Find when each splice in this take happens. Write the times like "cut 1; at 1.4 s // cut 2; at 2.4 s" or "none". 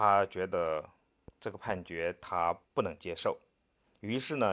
cut 1; at 2.7 s